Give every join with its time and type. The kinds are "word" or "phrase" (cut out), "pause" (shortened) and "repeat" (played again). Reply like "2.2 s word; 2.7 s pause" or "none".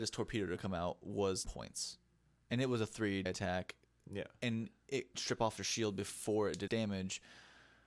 1.5 s word; 3.3 s word; 5.1 s word; 5.6 s word; 6.7 s word